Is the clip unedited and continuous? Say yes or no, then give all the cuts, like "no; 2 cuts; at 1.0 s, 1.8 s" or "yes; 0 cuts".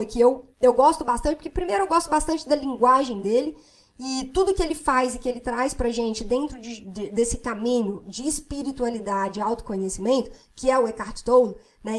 yes; 0 cuts